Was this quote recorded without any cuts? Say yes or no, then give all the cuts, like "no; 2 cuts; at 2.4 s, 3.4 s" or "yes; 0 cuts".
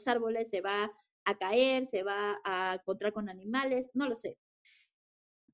yes; 0 cuts